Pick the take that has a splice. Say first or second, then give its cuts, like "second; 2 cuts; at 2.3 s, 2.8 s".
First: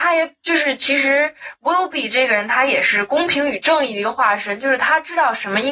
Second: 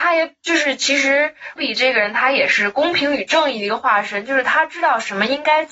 second; 1 cut; at 1.6 s